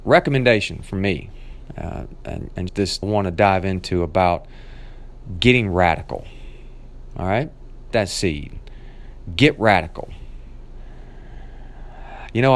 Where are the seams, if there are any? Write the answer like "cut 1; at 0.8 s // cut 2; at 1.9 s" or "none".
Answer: cut 1; at 2.7 s // cut 2; at 3.0 s // cut 3; at 7.9 s